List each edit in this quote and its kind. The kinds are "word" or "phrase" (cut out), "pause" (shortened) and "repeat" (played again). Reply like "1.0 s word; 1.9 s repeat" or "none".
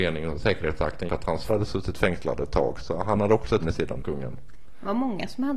1.1 s word; 1.5 s word; 3.6 s word; 4.0 s word